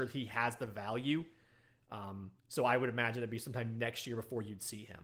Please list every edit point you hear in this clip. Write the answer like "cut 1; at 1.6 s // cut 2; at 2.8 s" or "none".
cut 1; at 2.4 s